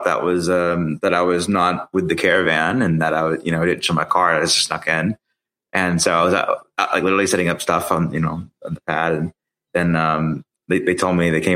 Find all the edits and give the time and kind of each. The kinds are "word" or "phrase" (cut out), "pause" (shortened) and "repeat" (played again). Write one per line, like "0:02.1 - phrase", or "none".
none